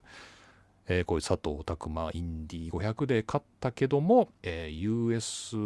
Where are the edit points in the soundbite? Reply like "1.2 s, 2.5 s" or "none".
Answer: 4.4 s